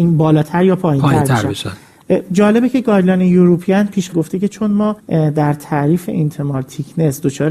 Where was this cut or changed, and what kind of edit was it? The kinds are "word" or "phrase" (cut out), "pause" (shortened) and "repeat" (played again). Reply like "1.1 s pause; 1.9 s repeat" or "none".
4.1 s phrase; 5.0 s pause